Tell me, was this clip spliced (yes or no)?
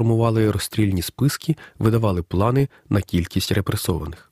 no